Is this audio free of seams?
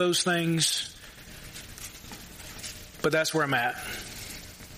yes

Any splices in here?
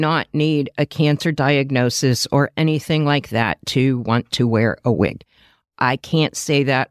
no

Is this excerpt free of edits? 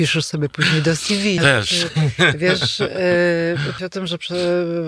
no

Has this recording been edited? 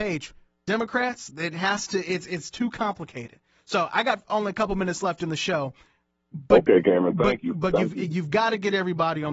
no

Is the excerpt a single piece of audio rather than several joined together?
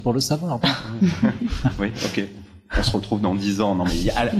yes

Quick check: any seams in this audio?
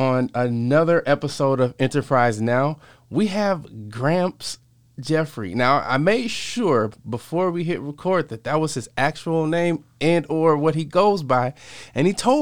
no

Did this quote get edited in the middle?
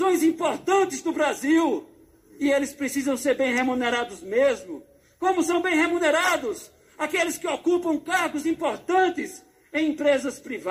no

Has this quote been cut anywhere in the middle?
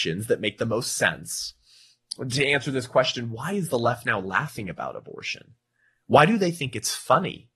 no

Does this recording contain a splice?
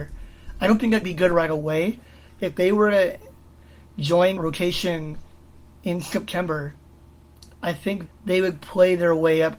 yes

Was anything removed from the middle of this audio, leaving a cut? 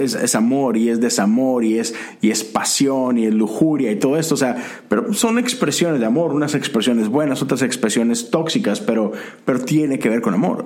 no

